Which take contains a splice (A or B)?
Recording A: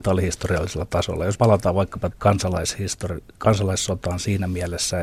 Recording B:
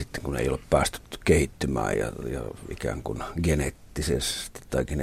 A